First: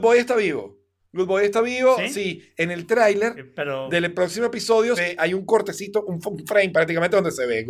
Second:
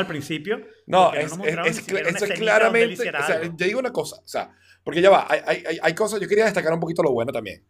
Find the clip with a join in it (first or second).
first